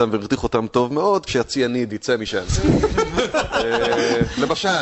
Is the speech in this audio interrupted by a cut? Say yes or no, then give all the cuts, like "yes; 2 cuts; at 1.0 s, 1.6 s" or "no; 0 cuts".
yes; 1 cut; at 1.3 s